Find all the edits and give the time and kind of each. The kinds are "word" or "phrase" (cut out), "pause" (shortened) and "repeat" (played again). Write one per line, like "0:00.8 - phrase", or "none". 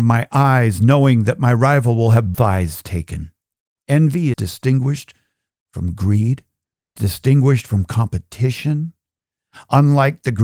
0:02.3 - word
0:04.3 - word
0:07.0 - word